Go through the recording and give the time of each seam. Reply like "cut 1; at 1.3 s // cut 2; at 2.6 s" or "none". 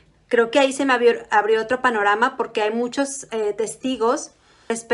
none